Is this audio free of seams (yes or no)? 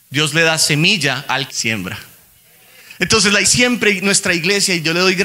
no